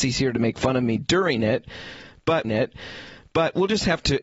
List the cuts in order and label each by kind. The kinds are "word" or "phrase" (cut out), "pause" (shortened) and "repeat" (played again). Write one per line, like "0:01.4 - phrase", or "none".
0:02.4 - repeat